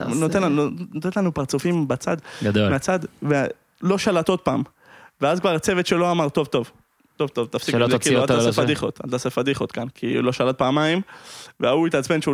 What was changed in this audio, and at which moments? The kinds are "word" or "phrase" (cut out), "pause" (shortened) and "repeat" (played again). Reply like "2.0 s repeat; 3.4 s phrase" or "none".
7.0 s pause